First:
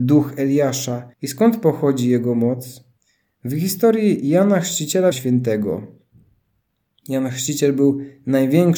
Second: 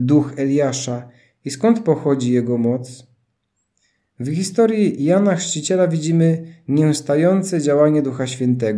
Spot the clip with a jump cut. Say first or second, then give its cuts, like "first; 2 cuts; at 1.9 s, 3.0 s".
first; 3 cuts; at 1.1 s, 3.0 s, 5.1 s